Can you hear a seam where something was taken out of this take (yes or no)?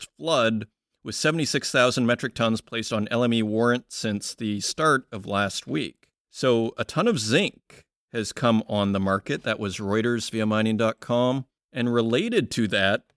no